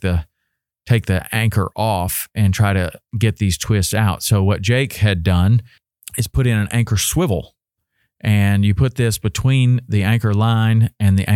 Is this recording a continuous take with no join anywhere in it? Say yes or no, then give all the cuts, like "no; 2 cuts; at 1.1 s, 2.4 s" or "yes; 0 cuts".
yes; 0 cuts